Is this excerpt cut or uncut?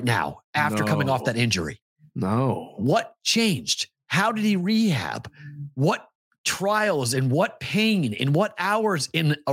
uncut